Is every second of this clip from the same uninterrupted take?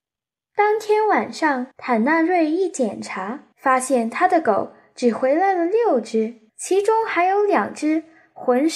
no; 3 cuts; at 1.7 s, 3.5 s, 6.5 s

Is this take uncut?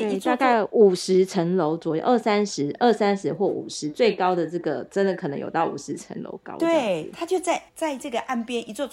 no; 1 cut; at 7.7 s

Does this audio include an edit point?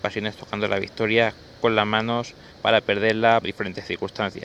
yes; 2 cuts; at 2.5 s, 3.4 s

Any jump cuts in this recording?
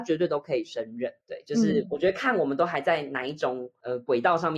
yes; 1 cut; at 1.2 s

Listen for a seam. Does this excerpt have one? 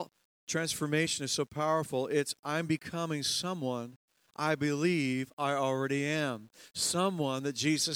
no; 0 cuts

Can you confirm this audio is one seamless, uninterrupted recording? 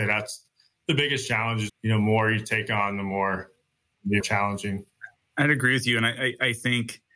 no; 2 cuts; at 1.7 s, 4.2 s

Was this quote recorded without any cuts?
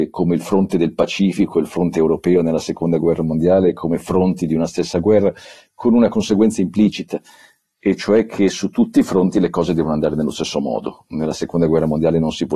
yes; 0 cuts

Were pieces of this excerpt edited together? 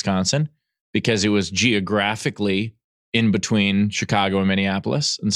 no; 0 cuts

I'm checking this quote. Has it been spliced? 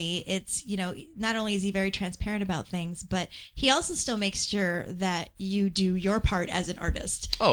no; 0 cuts

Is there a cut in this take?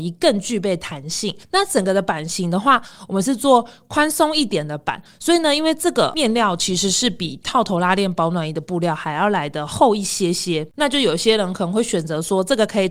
yes; 1 cut; at 1.4 s

